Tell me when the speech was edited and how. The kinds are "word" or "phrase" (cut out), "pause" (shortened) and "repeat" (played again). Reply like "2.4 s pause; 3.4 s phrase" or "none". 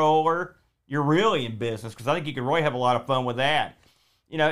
none